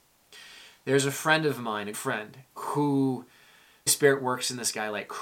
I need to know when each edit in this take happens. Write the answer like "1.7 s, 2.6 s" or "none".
1.9 s, 3.9 s